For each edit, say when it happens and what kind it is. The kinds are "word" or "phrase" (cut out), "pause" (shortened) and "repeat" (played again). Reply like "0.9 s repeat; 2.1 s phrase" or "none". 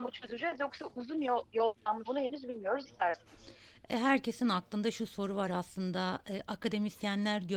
2.0 s word; 2.8 s word